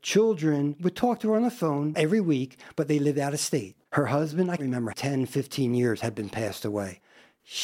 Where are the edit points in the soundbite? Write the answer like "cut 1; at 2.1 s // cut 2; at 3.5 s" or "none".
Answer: cut 1; at 3.9 s // cut 2; at 4.6 s // cut 3; at 4.9 s